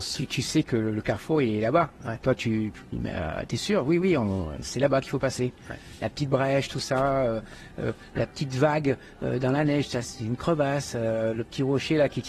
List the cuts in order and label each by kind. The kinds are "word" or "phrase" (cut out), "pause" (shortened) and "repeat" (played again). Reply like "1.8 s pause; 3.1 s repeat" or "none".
none